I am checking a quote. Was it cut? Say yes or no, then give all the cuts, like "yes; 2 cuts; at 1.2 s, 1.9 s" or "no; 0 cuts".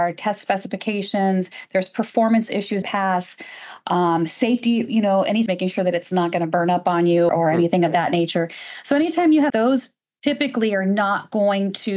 yes; 4 cuts; at 2.8 s, 5.5 s, 7.3 s, 9.5 s